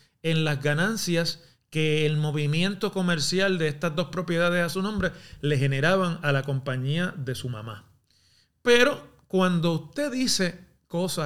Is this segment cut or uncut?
uncut